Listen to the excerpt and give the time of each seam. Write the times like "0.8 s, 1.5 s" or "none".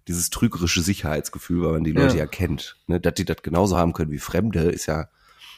none